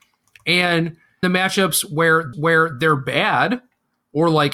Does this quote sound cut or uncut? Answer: cut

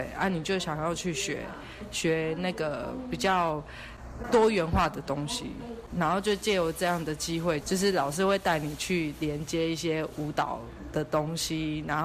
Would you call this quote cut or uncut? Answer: cut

